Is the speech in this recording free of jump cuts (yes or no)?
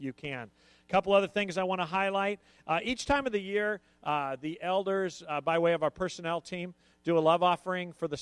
yes